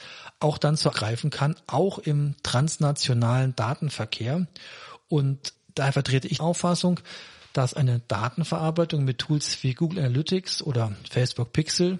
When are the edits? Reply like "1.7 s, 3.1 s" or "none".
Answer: 0.9 s, 5.5 s, 6.4 s